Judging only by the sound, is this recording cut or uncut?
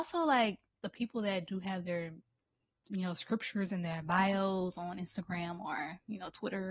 uncut